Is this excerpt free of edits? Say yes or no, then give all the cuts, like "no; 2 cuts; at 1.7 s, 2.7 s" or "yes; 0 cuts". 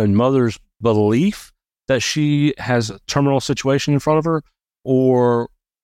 yes; 0 cuts